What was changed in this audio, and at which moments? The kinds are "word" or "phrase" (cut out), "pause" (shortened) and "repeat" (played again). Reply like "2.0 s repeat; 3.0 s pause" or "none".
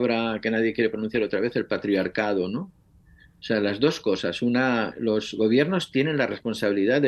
none